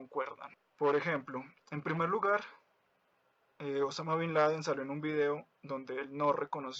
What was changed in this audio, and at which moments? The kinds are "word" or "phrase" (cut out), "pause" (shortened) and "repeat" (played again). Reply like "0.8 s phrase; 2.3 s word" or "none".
none